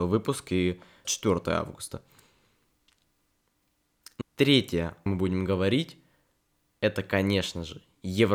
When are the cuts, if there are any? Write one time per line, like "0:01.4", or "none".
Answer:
0:01.0
0:04.2
0:05.1